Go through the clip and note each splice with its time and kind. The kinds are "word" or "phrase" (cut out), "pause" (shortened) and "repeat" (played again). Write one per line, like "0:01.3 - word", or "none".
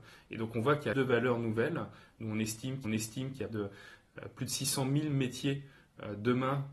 0:00.9 - phrase
0:02.8 - repeat
0:03.5 - word